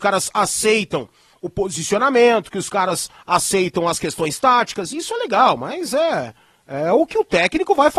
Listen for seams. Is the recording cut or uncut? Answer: uncut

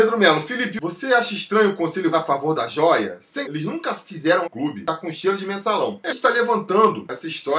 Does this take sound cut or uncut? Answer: cut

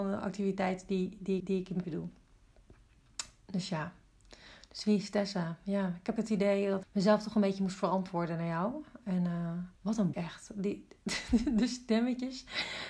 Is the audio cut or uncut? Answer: cut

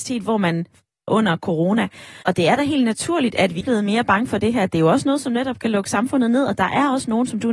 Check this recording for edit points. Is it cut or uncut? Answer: cut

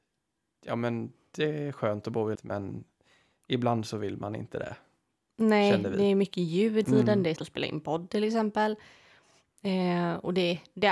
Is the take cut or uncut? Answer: cut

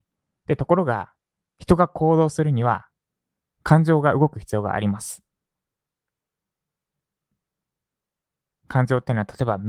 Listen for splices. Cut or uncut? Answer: uncut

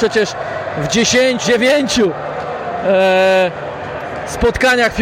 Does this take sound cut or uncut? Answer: cut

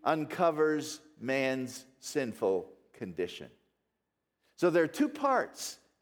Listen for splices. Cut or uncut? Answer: uncut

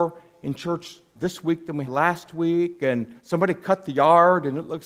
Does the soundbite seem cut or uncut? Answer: cut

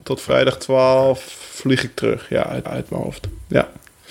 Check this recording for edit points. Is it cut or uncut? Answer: cut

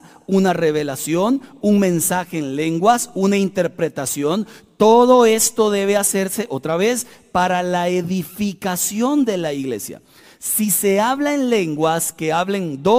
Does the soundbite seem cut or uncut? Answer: uncut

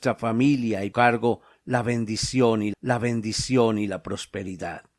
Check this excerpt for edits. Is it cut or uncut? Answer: cut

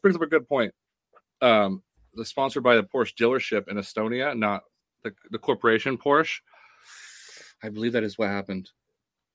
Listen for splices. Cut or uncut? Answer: uncut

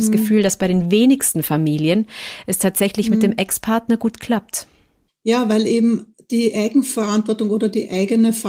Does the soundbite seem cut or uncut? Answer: uncut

